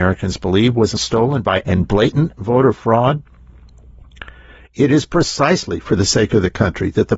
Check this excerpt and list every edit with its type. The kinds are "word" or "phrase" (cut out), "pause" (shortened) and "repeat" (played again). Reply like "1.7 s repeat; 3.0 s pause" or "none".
1.0 s word; 1.6 s word